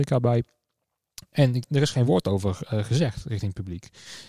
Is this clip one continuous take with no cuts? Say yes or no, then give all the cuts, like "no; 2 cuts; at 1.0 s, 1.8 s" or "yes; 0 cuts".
yes; 0 cuts